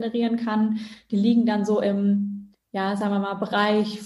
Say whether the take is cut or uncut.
cut